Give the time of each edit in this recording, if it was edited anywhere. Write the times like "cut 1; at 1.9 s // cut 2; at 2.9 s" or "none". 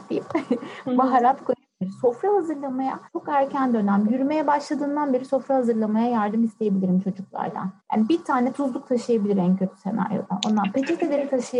cut 1; at 3.1 s // cut 2; at 7.8 s

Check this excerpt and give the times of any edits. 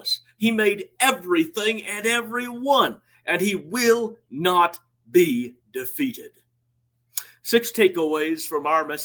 none

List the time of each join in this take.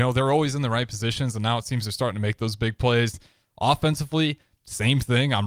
none

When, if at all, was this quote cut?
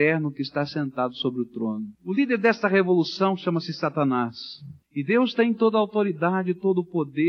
cut 1; at 1.9 s // cut 2; at 4.8 s

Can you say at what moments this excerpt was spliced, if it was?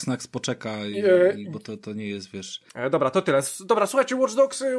cut 1; at 2.7 s

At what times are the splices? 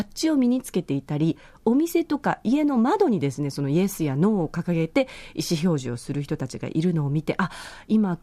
none

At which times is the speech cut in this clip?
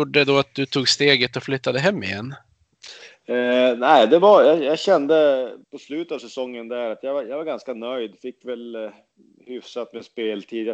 cut 1; at 5.6 s

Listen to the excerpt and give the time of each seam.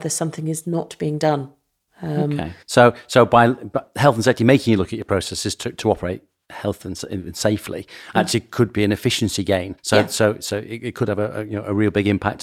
cut 1; at 2.6 s // cut 2; at 9.8 s

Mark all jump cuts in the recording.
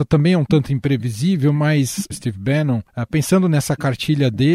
cut 1; at 2.1 s // cut 2; at 2.9 s

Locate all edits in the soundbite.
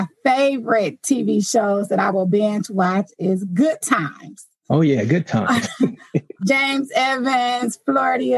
cut 1; at 6.4 s

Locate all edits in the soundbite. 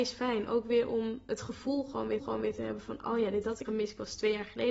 cut 1; at 2.2 s // cut 2; at 3.7 s

